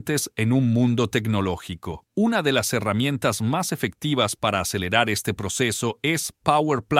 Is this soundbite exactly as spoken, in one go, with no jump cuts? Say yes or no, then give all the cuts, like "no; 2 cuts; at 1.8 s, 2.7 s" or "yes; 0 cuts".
no; 1 cut; at 2.1 s